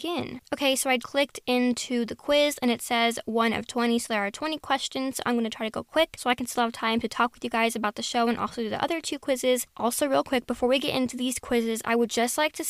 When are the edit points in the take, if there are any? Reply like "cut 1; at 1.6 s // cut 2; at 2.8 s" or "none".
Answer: cut 1; at 1.0 s